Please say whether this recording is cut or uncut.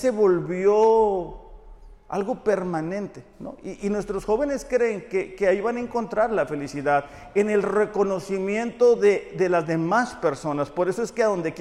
uncut